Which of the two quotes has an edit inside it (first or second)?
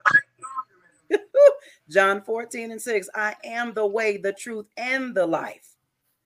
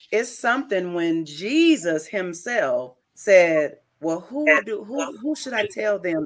second